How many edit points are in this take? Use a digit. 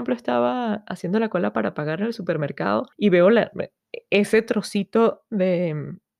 1